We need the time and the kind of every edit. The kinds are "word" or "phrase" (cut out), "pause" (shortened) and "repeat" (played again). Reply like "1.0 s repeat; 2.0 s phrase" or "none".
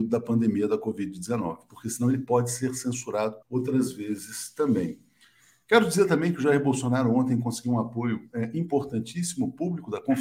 3.4 s pause